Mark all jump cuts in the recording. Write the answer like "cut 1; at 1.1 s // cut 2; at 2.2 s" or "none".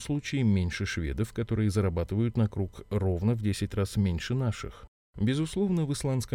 none